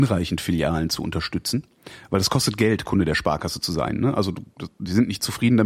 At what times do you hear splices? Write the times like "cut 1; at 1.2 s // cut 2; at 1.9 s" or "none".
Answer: none

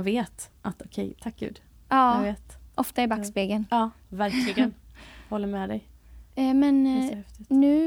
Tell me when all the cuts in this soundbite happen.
cut 1; at 6.3 s

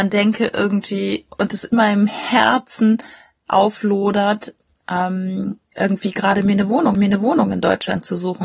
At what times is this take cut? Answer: cut 1; at 1.7 s // cut 2; at 6.9 s

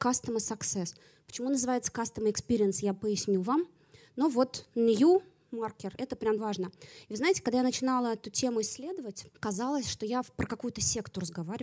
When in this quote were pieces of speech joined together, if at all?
cut 1; at 6.4 s

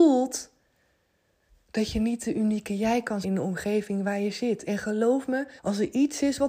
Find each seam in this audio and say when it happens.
cut 1; at 3.2 s // cut 2; at 5.6 s

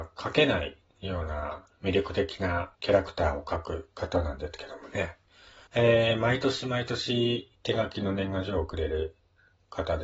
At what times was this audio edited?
cut 1; at 2.7 s // cut 2; at 5.7 s // cut 3; at 7.5 s

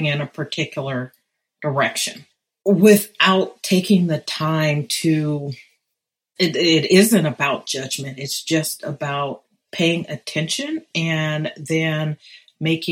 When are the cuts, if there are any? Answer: none

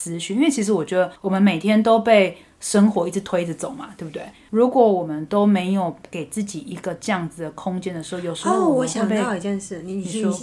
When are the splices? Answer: cut 1; at 1.2 s

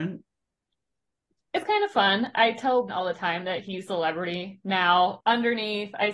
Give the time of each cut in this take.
cut 1; at 2.9 s // cut 2; at 3.9 s // cut 3; at 5.2 s

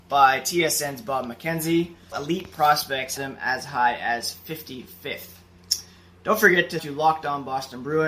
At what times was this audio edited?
cut 1; at 2.1 s // cut 2; at 3.2 s // cut 3; at 6.8 s

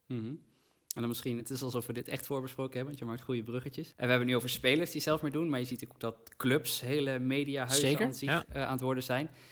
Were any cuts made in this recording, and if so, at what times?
cut 1; at 1.4 s // cut 2; at 3.9 s

